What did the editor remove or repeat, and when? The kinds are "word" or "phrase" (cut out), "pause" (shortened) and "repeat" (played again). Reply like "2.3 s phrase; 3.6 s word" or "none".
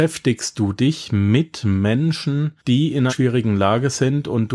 2.6 s pause; 3.1 s word